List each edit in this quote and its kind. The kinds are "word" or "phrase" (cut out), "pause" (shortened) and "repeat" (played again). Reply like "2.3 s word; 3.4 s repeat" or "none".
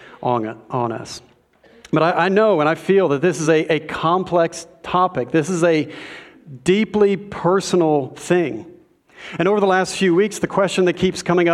none